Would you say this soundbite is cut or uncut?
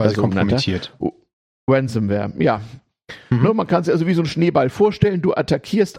uncut